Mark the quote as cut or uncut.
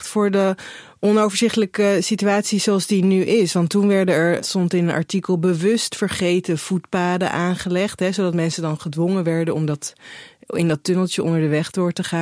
uncut